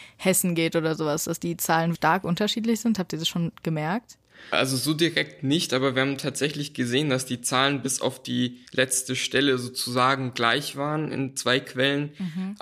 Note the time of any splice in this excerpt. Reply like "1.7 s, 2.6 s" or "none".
2.0 s, 8.7 s